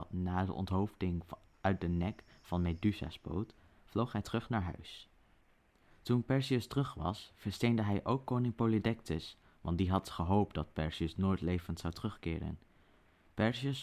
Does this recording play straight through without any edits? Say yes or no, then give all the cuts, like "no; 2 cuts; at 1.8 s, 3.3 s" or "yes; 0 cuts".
yes; 0 cuts